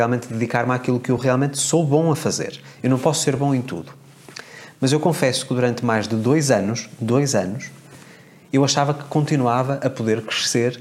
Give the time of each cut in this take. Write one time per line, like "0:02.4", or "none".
none